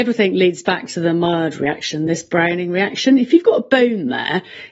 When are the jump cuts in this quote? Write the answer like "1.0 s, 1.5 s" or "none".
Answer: none